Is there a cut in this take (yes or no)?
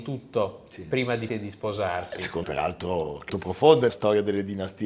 yes